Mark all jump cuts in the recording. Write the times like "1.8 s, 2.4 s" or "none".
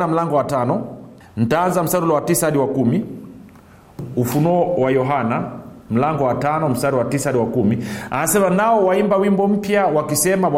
1.2 s